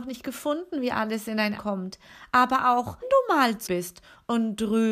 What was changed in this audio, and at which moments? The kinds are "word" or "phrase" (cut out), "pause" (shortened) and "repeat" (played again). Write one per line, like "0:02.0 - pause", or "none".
0:01.6 - word
0:03.0 - word
0:03.7 - word